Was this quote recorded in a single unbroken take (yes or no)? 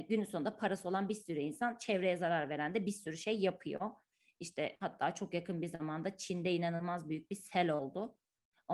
yes